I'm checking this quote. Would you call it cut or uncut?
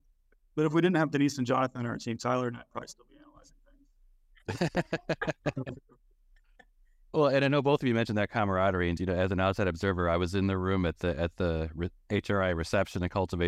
cut